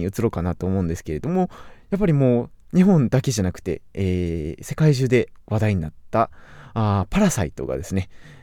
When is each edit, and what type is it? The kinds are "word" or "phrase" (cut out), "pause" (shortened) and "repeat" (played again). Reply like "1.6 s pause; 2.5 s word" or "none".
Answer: none